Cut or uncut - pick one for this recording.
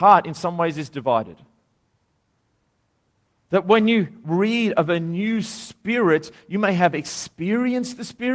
uncut